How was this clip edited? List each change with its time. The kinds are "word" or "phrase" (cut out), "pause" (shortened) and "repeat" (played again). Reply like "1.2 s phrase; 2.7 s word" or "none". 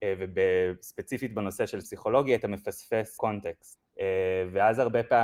1.8 s word; 3.2 s word